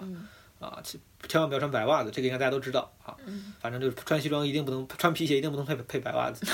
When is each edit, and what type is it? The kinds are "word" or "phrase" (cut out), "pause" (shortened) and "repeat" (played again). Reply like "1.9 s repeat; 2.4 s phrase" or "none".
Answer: 3.6 s word